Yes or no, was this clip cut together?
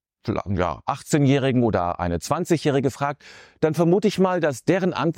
no